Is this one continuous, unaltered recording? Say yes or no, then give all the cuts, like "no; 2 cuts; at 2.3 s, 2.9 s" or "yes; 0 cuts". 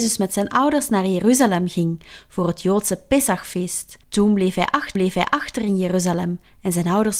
no; 2 cuts; at 4.0 s, 5.0 s